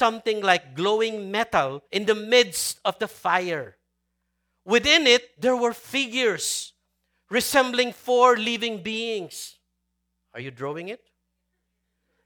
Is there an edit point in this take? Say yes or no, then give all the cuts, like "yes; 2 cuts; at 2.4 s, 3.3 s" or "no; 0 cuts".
yes; 1 cut; at 1.9 s